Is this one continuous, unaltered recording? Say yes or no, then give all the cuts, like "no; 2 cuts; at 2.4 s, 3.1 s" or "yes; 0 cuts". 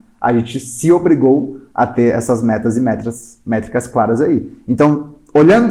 yes; 0 cuts